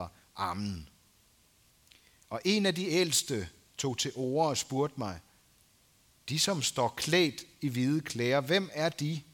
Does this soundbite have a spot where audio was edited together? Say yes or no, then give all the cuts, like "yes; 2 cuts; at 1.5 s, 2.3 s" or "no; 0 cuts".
no; 0 cuts